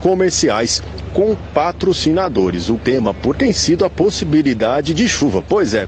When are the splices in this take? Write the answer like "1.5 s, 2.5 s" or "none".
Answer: 2.8 s, 3.3 s